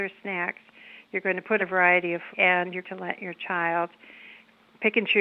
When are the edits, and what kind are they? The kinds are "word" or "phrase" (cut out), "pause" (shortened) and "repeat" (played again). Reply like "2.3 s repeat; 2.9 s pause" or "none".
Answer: 1.6 s word; 2.3 s word; 2.8 s word